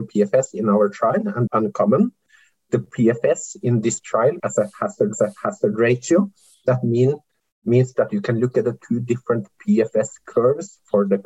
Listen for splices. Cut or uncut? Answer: cut